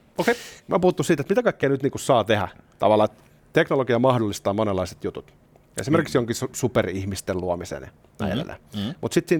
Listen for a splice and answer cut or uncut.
uncut